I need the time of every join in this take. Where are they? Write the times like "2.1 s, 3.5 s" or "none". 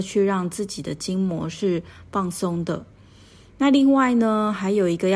none